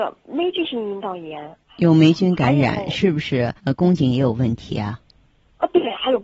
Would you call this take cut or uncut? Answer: cut